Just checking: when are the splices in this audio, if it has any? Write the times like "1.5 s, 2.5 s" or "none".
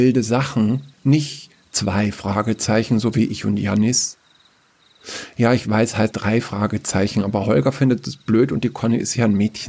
0.9 s, 6.1 s

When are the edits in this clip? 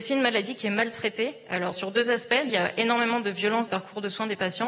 1.7 s, 2.5 s, 3.7 s

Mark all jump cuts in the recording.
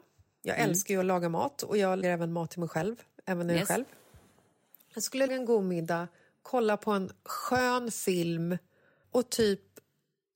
2.0 s, 5.3 s, 9.0 s

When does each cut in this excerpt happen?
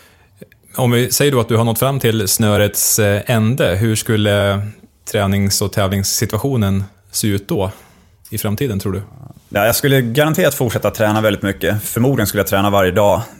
none

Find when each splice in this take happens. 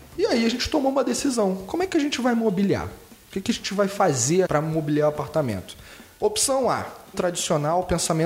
4.5 s, 7.1 s

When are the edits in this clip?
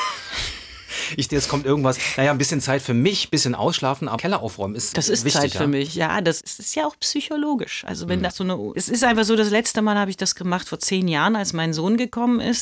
1.3 s, 4.2 s, 4.9 s, 8.3 s, 8.7 s

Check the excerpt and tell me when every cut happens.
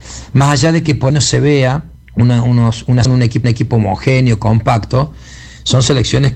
1.1 s, 1.9 s, 3.1 s, 3.4 s

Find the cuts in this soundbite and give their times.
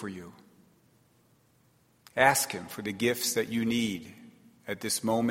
none

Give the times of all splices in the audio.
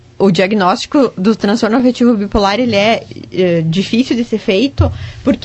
1.2 s

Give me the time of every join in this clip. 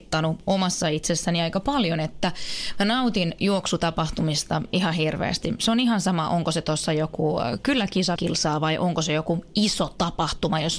8.2 s

